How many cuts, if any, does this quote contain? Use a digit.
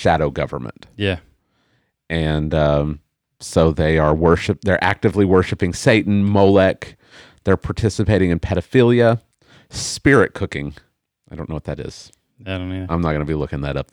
0